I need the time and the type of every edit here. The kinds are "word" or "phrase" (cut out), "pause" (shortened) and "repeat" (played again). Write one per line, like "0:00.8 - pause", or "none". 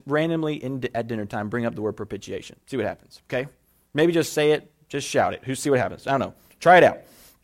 none